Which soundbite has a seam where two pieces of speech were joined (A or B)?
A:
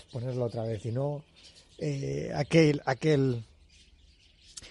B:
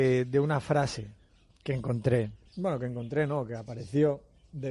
B